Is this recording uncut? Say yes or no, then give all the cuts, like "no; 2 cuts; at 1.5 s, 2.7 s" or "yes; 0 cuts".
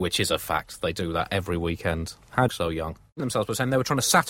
no; 2 cuts; at 2.5 s, 3.2 s